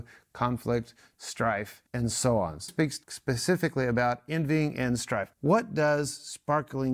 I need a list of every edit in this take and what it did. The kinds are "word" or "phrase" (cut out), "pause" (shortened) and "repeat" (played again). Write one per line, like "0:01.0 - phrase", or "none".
0:01.9 - pause
0:02.7 - word
0:03.0 - pause
0:05.3 - pause